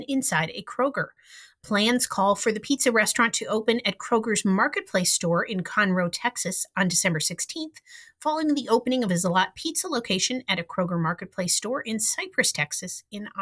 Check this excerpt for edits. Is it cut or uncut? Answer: uncut